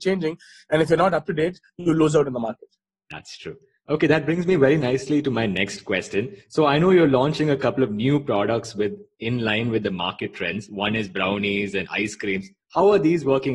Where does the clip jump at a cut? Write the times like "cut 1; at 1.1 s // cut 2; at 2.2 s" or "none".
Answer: none